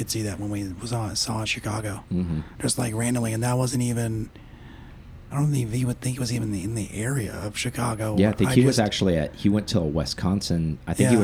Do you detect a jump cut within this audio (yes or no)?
yes